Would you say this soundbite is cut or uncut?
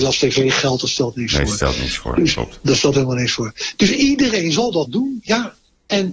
cut